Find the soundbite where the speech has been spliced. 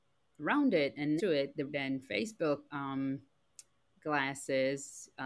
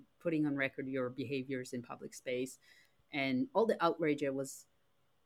first; 3 cuts; at 1.2 s, 1.7 s, 2.7 s

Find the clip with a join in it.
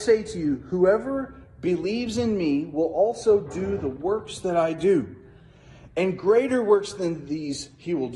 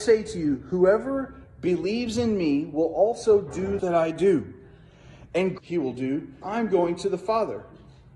second; 3 cuts; at 3.8 s, 5.6 s, 6.4 s

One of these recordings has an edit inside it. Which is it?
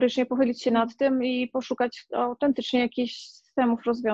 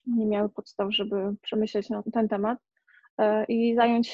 second; 1 cut; at 2.0 s

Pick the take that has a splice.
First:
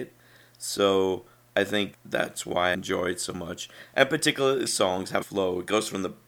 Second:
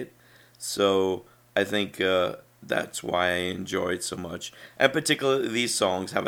first; 4 cuts; at 1.9 s, 2.7 s, 4.7 s, 5.2 s

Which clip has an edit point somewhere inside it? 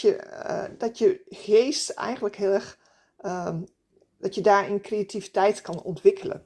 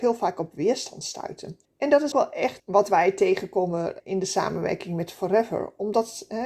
second; 4 cuts; at 1.6 s, 2.1 s, 2.6 s, 4.0 s

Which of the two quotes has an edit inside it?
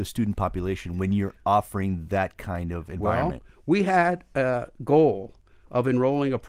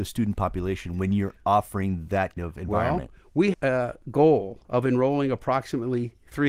second; 3 cuts; at 2.4 s, 3.5 s, 4.6 s

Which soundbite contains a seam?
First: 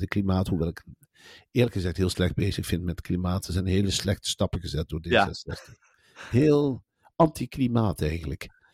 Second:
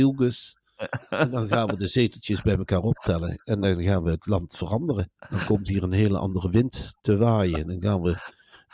second; 1 cut; at 5.2 s

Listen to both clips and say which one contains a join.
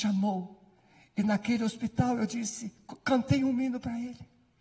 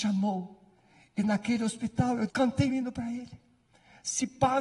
second; 2 cuts; at 2.3 s, 2.7 s

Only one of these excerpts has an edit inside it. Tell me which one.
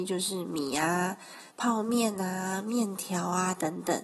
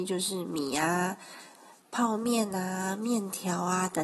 first; 1 cut; at 1.5 s

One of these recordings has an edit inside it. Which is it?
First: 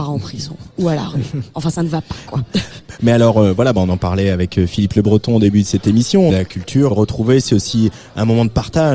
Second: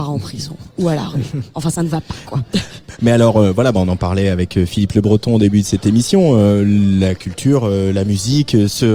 first; 2 cuts; at 6.3 s, 6.9 s

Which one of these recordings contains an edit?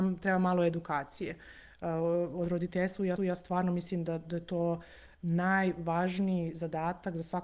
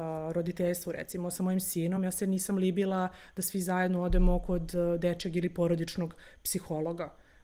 first; 1 cut; at 3.2 s

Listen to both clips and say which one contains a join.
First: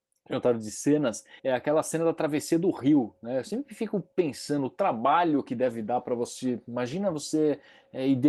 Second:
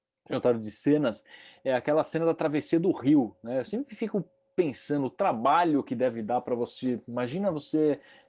first; 2 cuts; at 1.4 s, 4.1 s

